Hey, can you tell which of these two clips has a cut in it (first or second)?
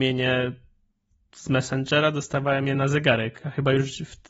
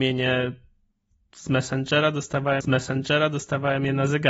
second